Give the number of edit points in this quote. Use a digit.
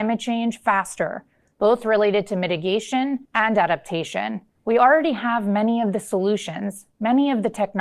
2